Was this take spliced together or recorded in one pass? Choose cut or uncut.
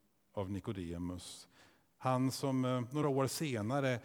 uncut